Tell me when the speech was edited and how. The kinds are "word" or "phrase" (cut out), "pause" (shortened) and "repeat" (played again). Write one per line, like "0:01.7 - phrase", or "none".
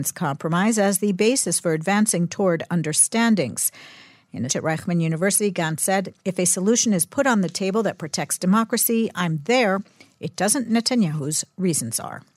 0:04.5 - word
0:06.2 - pause
0:10.7 - phrase